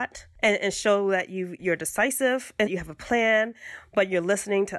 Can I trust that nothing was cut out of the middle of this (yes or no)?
no